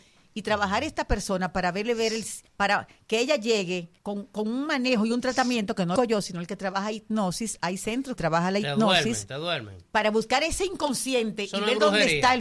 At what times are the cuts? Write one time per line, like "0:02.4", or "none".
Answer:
0:02.5
0:04.0
0:06.0
0:08.2